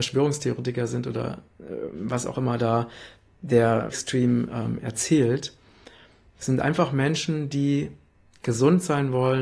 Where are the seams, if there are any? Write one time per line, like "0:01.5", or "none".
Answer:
0:03.9